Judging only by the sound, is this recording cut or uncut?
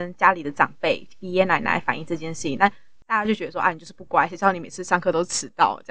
uncut